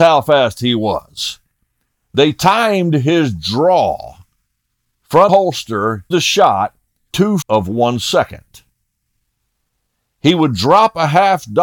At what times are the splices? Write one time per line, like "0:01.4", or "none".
0:05.3
0:06.1
0:07.1
0:07.4